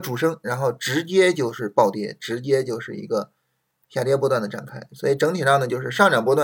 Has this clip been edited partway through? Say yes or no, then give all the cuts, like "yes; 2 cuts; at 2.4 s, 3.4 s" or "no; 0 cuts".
no; 0 cuts